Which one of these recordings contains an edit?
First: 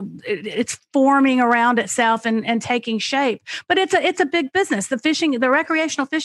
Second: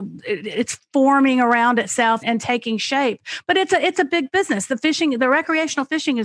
second; 1 cut; at 2.2 s

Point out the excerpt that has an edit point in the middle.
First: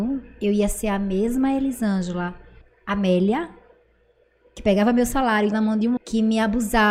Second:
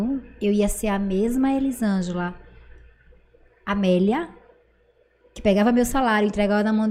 first; 3 cuts; at 2.6 s, 5.5 s, 6.0 s

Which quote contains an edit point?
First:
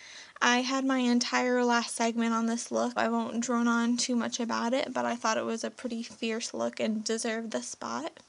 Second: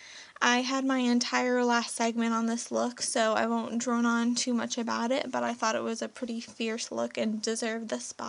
first; 1 cut; at 3.0 s

